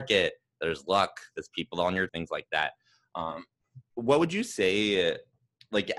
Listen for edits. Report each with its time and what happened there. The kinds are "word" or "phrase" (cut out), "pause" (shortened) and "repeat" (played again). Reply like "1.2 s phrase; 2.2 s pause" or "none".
2.1 s word; 3.8 s word